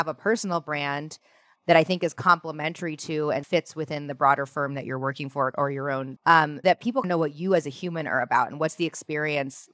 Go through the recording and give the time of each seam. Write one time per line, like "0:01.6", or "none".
0:06.2
0:06.6
0:07.0